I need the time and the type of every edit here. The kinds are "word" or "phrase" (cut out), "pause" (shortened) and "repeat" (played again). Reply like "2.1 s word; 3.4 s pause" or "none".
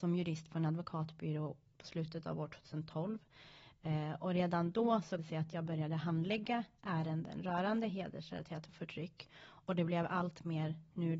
5.2 s word; 8.7 s word